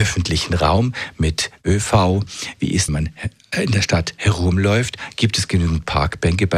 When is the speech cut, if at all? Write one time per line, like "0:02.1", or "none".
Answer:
0:02.9